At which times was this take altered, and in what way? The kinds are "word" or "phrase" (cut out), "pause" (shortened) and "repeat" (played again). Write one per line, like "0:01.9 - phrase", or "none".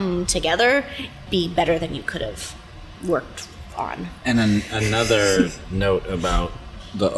0:01.3 - word